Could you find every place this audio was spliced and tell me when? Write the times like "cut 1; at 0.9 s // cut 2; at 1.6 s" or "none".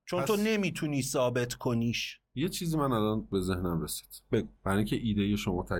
cut 1; at 2.3 s // cut 2; at 4.6 s